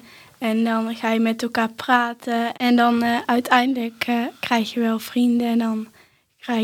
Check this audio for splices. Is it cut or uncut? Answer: uncut